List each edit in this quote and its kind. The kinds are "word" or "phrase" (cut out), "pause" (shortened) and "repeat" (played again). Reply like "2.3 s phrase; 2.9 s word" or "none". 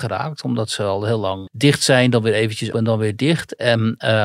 1.5 s word; 2.7 s word